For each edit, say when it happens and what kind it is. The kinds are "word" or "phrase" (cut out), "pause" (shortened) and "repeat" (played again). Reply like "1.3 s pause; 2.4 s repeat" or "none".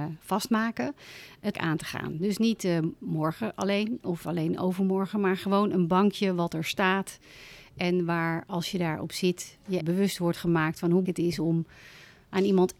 1.5 s word; 9.8 s word; 11.0 s word